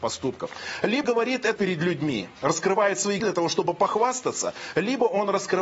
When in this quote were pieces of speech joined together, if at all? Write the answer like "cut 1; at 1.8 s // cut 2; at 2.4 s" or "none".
cut 1; at 1.0 s // cut 2; at 1.6 s // cut 3; at 3.2 s